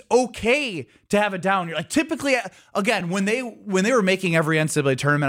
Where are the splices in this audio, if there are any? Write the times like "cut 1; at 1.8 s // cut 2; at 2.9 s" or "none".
none